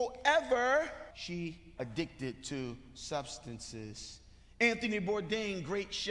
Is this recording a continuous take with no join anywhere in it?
no; 2 cuts; at 1.1 s, 1.8 s

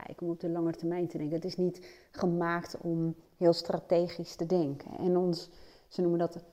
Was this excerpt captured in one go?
yes; 0 cuts

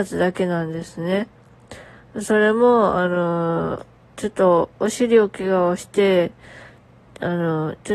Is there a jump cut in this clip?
no; 0 cuts

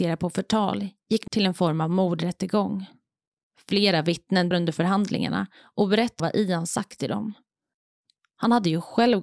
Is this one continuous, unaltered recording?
no; 3 cuts; at 1.3 s, 4.5 s, 6.2 s

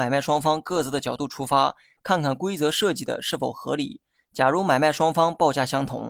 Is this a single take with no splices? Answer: yes; 0 cuts

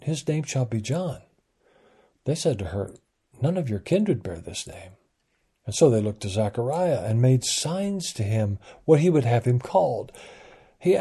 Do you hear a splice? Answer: no; 0 cuts

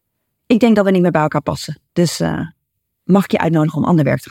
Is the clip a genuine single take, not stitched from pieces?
no; 1 cut; at 1.9 s

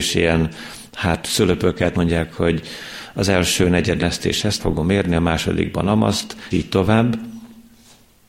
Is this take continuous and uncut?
no; 4 cuts; at 1.9 s, 4.0 s, 4.6 s, 6.5 s

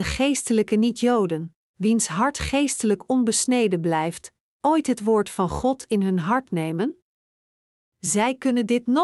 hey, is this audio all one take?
yes; 0 cuts

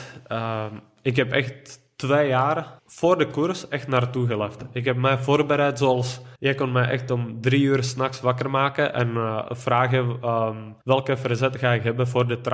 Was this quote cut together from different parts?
yes; 3 cuts; at 2.8 s, 6.4 s, 10.8 s

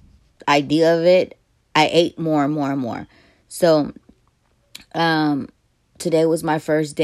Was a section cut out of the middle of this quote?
no; 0 cuts

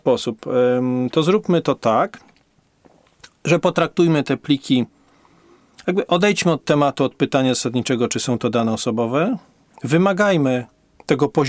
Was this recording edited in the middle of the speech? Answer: no; 0 cuts

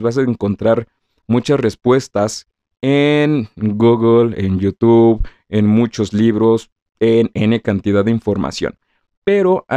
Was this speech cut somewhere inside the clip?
no; 0 cuts

